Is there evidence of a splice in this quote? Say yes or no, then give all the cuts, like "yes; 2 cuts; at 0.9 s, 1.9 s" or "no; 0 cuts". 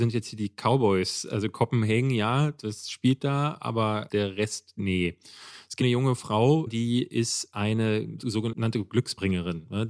yes; 3 cuts; at 4.1 s, 5.8 s, 6.7 s